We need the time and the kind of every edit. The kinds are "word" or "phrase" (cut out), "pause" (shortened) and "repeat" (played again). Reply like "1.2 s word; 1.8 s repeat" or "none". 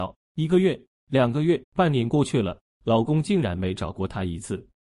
1.6 s pause